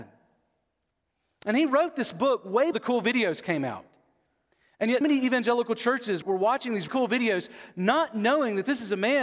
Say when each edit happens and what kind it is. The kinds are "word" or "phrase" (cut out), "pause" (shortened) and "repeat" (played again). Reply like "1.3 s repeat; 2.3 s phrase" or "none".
2.7 s word; 5.0 s word; 6.2 s word; 6.9 s word